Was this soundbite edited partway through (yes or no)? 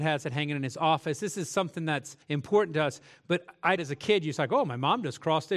yes